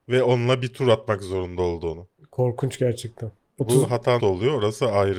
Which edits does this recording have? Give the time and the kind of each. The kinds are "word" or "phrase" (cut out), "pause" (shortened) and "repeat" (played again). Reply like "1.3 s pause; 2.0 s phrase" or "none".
4.2 s word